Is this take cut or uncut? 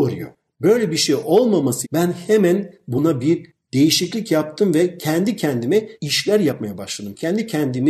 cut